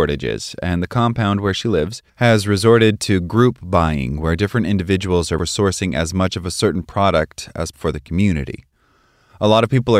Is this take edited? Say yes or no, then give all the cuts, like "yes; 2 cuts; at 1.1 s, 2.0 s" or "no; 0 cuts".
yes; 3 cuts; at 2.1 s, 5.4 s, 7.7 s